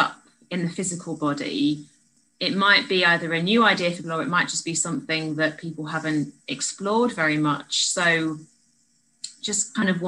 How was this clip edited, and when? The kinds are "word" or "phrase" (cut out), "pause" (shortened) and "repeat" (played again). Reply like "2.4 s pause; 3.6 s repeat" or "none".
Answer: 4.0 s word

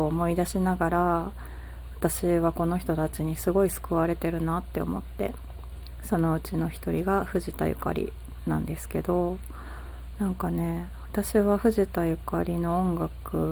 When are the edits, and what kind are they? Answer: none

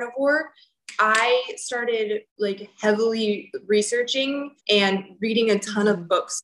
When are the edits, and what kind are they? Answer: 2.3 s pause; 4.6 s pause

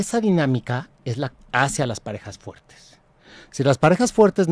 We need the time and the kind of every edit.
1.3 s word

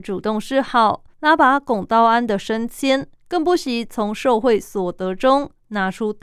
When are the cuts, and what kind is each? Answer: 1.1 s pause; 3.2 s pause

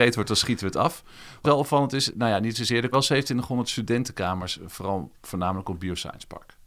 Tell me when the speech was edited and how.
1.4 s word; 2.9 s word

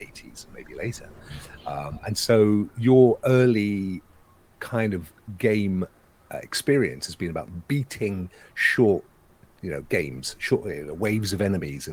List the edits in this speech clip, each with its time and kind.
none

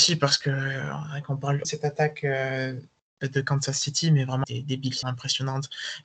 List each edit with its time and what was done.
1.6 s phrase; 4.4 s word; 5.0 s word

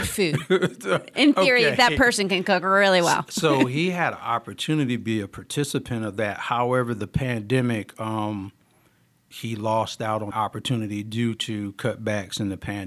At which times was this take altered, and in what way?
10.3 s word

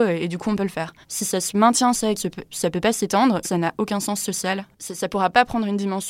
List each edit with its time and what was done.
1.0 s pause; 1.9 s word; 3.4 s word; 4.7 s pause

